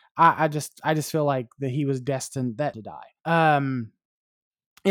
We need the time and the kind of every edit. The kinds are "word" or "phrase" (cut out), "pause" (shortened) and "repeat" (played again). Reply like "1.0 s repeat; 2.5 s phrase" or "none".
2.7 s phrase; 3.2 s pause